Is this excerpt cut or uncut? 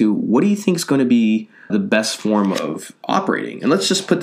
cut